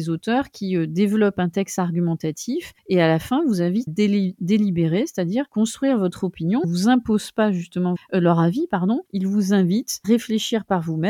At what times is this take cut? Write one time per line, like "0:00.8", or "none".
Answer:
0:02.8
0:03.9
0:05.5
0:06.6
0:08.0
0:09.1
0:10.0